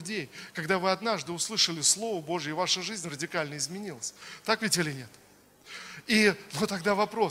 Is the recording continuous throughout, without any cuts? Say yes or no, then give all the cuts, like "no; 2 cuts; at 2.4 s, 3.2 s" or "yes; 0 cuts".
yes; 0 cuts